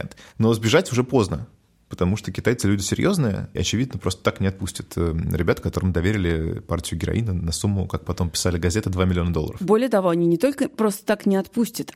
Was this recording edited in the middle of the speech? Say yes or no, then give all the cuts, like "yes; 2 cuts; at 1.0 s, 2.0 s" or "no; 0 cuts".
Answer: yes; 1 cut; at 3.6 s